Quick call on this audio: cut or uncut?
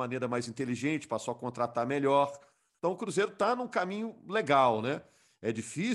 uncut